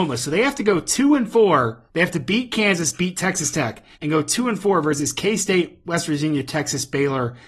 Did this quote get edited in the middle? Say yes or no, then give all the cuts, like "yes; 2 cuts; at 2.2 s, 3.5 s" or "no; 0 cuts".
yes; 2 cuts; at 1.9 s, 3.9 s